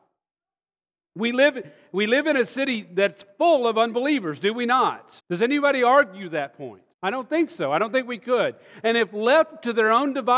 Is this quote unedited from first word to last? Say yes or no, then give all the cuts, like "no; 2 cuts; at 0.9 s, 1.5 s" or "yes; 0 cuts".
no; 2 cuts; at 5.2 s, 6.9 s